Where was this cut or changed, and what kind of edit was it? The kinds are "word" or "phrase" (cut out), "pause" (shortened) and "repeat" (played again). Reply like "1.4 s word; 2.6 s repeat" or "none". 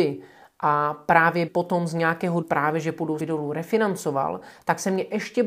1.5 s word; 2.4 s word; 3.2 s word